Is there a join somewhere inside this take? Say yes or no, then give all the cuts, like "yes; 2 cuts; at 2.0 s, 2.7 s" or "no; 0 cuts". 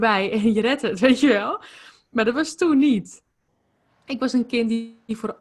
no; 0 cuts